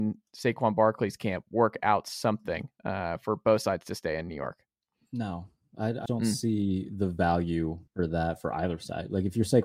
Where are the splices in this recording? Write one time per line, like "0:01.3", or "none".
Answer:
0:06.1
0:07.9